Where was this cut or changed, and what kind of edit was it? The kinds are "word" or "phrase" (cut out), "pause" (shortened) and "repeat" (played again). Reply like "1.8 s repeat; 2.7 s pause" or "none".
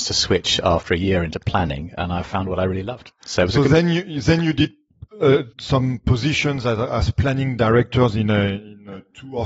3.2 s pause; 5.5 s pause